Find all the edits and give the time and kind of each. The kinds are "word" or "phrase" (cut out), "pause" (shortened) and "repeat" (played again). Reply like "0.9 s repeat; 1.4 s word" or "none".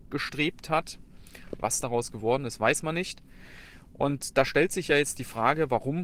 none